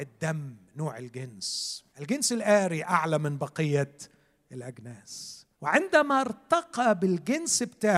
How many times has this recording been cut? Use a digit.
2